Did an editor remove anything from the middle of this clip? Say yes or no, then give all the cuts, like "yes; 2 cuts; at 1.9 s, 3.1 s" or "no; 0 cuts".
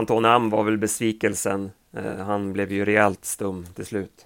no; 0 cuts